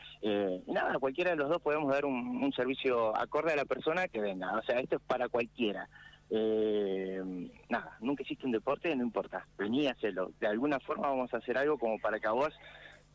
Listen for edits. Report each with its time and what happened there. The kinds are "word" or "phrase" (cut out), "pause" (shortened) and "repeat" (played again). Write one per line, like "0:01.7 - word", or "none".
0:04.1 - word
0:09.5 - pause